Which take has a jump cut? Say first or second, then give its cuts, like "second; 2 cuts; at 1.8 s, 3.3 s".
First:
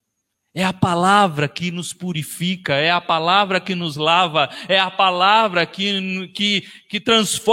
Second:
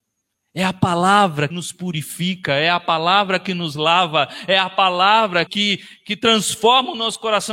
second; 2 cuts; at 1.5 s, 5.5 s